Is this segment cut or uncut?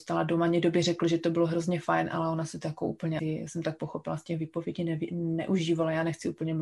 cut